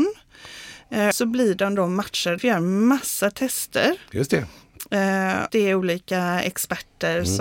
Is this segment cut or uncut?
cut